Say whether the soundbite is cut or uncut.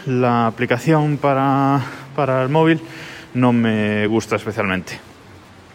uncut